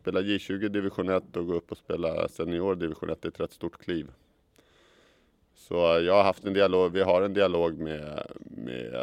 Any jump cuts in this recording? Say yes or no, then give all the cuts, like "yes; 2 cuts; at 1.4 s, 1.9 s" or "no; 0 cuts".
no; 0 cuts